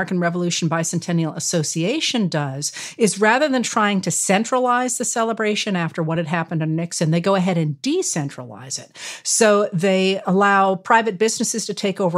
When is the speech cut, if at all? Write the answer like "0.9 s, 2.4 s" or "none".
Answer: none